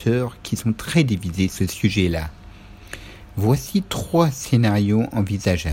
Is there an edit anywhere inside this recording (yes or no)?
yes